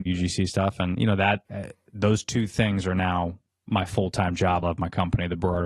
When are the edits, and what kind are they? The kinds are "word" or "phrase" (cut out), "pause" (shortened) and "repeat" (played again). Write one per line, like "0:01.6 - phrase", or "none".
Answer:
0:01.4 - pause
0:03.5 - pause
0:04.6 - phrase